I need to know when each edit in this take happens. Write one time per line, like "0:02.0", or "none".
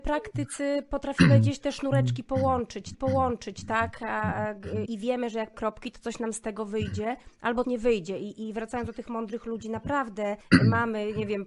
0:02.9
0:04.9
0:05.5
0:07.6
0:10.4